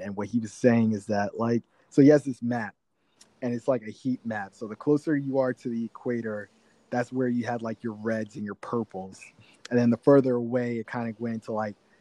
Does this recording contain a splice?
no; 0 cuts

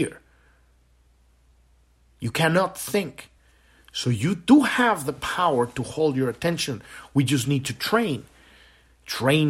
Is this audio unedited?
yes; 0 cuts

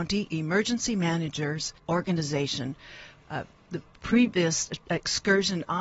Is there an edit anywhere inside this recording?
yes; 1 cut; at 1.8 s

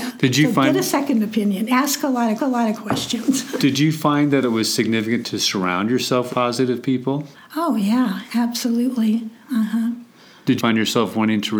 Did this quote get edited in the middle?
yes; 5 cuts; at 2.4 s, 3.6 s, 6.3 s, 7.3 s, 10.6 s

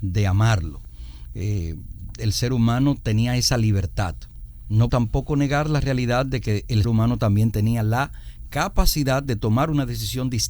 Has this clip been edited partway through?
yes; 2 cuts; at 4.9 s, 6.8 s

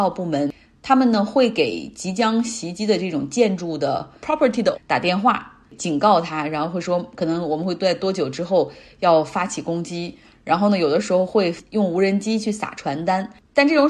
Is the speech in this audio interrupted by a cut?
yes; 1 cut; at 4.7 s

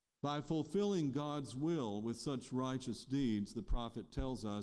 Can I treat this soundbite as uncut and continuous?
yes; 0 cuts

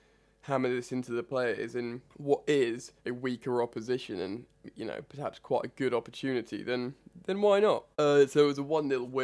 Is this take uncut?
no; 3 cuts; at 2.1 s, 3.0 s, 7.9 s

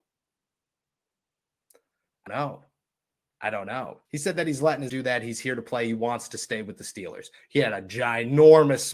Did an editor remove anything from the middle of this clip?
yes; 3 cuts; at 2.3 s, 4.1 s, 4.9 s

